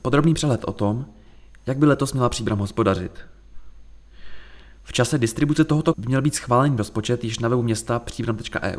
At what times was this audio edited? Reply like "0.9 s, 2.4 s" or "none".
5.9 s